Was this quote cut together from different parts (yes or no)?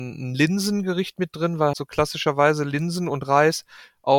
yes